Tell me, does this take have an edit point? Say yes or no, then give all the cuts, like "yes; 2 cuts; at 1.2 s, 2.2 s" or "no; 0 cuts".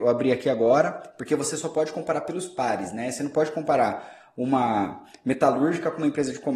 no; 0 cuts